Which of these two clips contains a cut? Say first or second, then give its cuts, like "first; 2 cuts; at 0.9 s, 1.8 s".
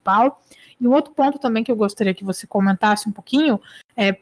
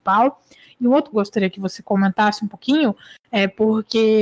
second; 1 cut; at 1.1 s